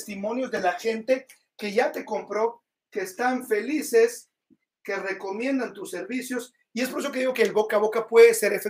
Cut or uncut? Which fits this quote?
uncut